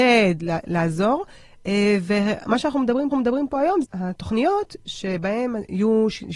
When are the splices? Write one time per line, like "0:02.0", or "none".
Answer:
0:03.1
0:03.8